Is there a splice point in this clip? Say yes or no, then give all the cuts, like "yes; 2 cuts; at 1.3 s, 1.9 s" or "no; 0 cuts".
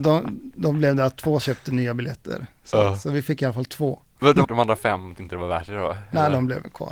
yes; 3 cuts; at 1.4 s, 4.4 s, 5.2 s